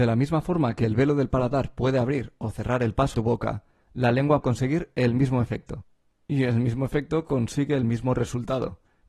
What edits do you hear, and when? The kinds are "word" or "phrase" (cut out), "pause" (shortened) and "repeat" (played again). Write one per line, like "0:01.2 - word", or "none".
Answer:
0:03.1 - word
0:04.4 - word

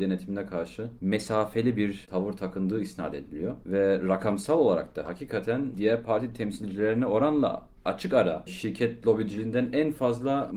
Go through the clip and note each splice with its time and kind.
none

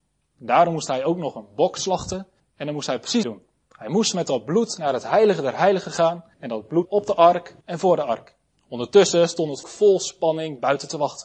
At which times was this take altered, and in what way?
0:02.4 - pause
0:03.2 - phrase
0:06.3 - pause
0:06.8 - word
0:07.6 - pause
0:08.5 - pause
0:09.6 - word

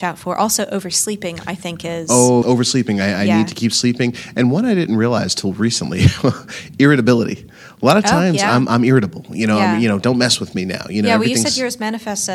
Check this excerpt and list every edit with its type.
0:02.4 - word

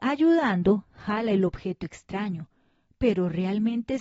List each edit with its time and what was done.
none

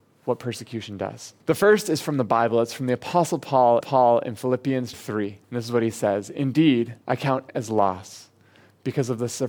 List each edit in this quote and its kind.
0:01.4 - pause
0:03.8 - repeat
0:04.9 - word
0:05.4 - pause
0:07.0 - pause
0:07.5 - word

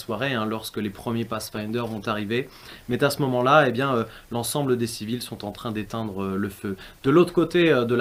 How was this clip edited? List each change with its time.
none

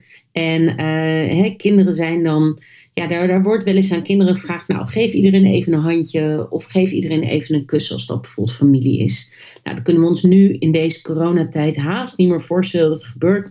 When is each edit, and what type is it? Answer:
none

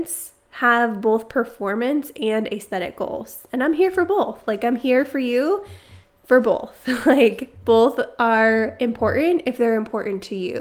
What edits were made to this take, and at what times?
none

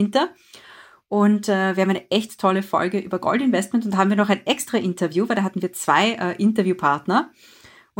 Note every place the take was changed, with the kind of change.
none

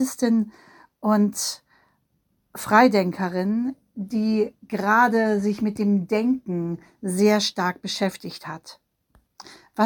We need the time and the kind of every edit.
none

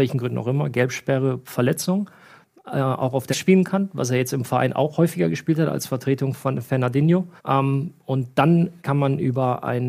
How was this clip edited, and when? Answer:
0:03.3 - word
0:07.4 - pause
0:08.8 - pause

